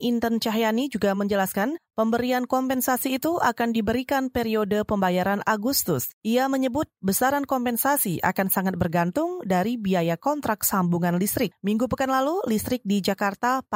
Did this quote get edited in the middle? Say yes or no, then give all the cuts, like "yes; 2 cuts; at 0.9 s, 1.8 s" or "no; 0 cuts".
no; 0 cuts